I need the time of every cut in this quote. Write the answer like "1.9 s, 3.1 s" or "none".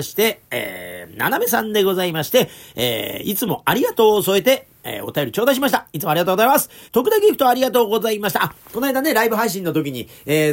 6.9 s